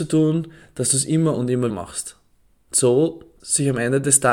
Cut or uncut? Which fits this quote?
cut